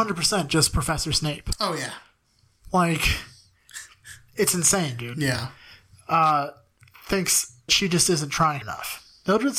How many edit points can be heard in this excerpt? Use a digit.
2